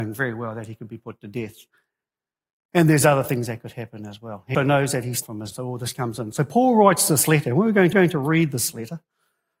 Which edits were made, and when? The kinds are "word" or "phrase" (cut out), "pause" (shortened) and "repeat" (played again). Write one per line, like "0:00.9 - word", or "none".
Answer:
0:04.5 - word
0:05.2 - word
0:05.5 - word
0:07.9 - repeat

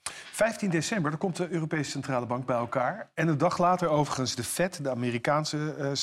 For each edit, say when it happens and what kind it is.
none

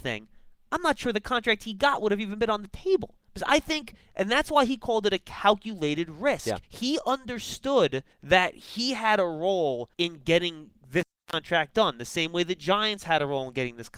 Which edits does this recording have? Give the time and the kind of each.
0:03.3 - pause
0:06.6 - pause
0:08.1 - pause
0:09.9 - pause
0:10.8 - pause

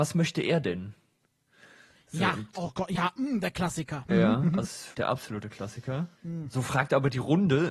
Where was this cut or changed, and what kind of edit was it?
0:04.6 - word
0:04.9 - word
0:06.2 - pause

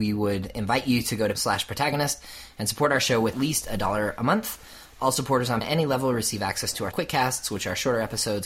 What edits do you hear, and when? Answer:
0:01.3 - word
0:03.3 - word
0:05.6 - word
0:06.9 - word

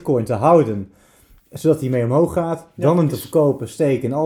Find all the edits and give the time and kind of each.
0:03.1 - word

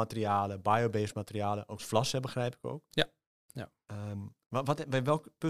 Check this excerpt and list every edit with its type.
0:01.8 - word

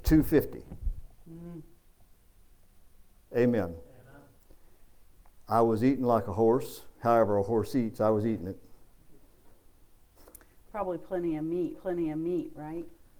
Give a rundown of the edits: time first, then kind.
0:11.7 - repeat

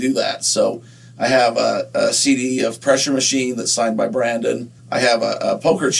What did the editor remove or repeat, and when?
0:04.8 - pause

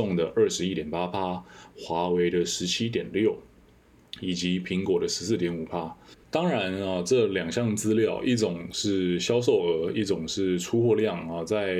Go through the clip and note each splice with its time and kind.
0:06.2 - pause

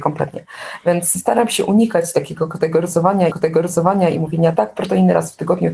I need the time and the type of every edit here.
0:01.1 - word
0:03.3 - repeat
0:04.5 - word

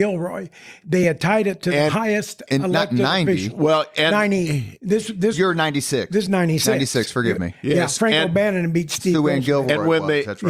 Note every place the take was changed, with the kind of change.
none

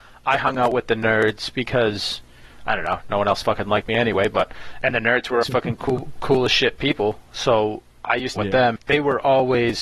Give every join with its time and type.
0:05.4 - word
0:08.4 - phrase
0:08.8 - word

